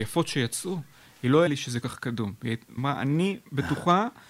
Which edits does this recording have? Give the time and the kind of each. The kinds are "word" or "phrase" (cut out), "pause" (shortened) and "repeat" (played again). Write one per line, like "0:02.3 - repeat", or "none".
0:01.5 - word
0:01.8 - word
0:02.8 - word